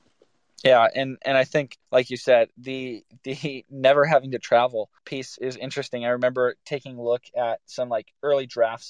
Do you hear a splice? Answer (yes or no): yes